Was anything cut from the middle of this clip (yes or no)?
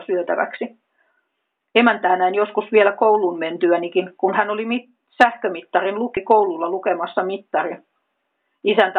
no